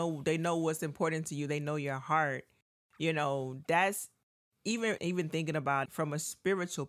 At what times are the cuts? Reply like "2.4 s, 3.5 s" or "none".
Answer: 5.0 s, 5.9 s